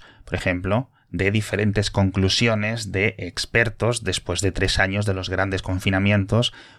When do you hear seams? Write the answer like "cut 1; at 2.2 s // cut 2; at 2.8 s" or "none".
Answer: none